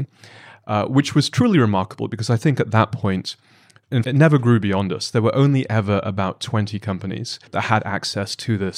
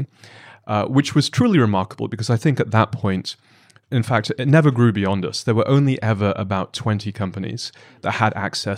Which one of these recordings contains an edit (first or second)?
first